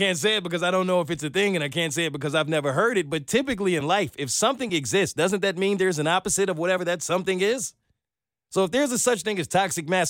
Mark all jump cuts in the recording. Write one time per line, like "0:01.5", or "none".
none